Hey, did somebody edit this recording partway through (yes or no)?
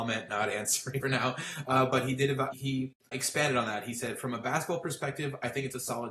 yes